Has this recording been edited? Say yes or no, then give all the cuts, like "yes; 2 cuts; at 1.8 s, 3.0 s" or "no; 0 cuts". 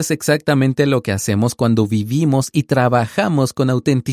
no; 0 cuts